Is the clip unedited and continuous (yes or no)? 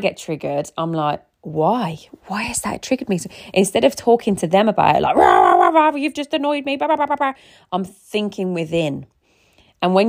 yes